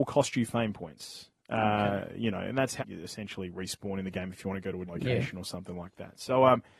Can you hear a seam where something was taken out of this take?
yes; 2 cuts; at 2.8 s, 4.9 s

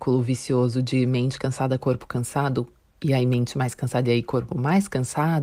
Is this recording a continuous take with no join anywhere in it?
yes; 0 cuts

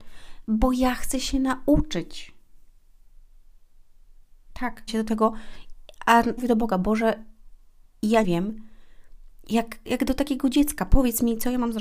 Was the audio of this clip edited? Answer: yes; 4 cuts; at 4.9 s, 6.4 s, 8.2 s, 9.9 s

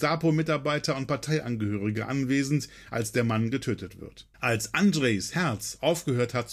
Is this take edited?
yes; 1 cut; at 4.3 s

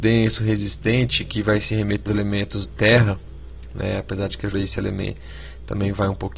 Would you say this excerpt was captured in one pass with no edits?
no; 3 cuts; at 2.1 s, 2.6 s, 4.5 s

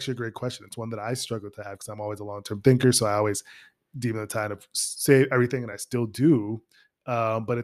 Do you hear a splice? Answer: no; 0 cuts

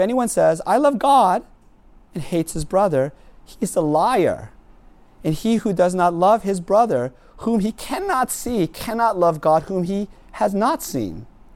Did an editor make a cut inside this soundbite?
no; 0 cuts

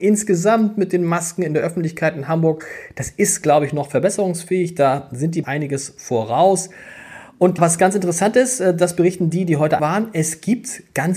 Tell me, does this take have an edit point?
yes; 3 cuts; at 5.4 s, 7.6 s, 9.8 s

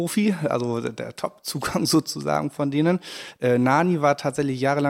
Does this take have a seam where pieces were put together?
no; 0 cuts

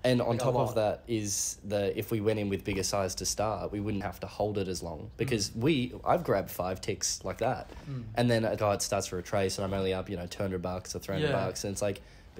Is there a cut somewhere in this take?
yes; 2 cuts; at 4.0 s, 8.6 s

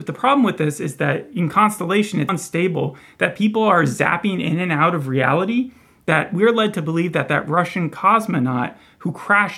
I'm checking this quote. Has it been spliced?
yes; 1 cut; at 2.3 s

